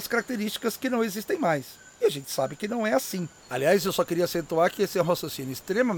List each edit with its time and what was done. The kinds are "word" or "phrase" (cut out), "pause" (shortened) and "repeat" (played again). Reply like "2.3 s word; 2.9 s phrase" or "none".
3.4 s pause